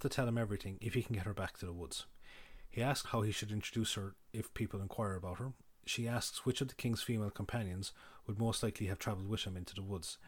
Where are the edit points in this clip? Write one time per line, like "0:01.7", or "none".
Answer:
0:03.0